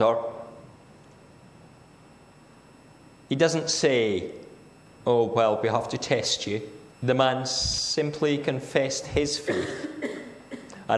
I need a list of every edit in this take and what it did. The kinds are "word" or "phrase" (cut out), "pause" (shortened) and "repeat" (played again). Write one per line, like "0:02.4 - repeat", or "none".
0:06.9 - pause